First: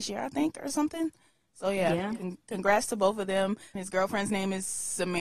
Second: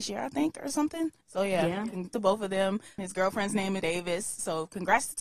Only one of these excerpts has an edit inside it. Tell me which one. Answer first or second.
second